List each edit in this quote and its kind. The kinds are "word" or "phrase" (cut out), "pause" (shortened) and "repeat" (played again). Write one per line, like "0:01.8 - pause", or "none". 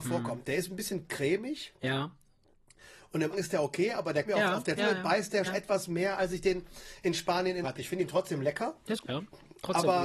0:03.3 - word
0:04.2 - word
0:04.8 - word
0:05.5 - word
0:07.6 - word
0:09.0 - word